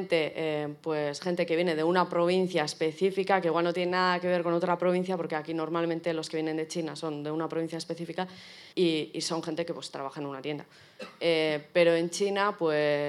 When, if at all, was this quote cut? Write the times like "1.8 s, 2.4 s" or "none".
8.7 s